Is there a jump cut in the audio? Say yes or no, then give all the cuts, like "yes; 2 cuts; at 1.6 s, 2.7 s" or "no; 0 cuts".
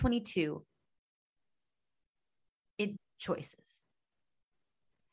yes; 1 cut; at 3.0 s